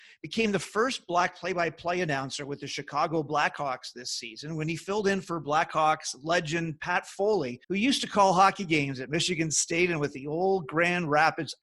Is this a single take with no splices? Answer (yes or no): no